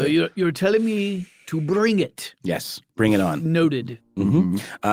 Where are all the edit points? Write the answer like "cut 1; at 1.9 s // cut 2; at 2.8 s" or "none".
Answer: cut 1; at 2.9 s